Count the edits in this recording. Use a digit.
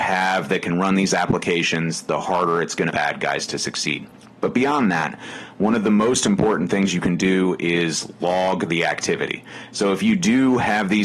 2